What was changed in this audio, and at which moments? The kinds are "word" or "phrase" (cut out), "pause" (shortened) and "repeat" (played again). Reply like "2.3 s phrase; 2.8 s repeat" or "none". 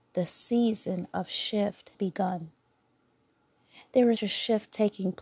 1.9 s word; 4.2 s word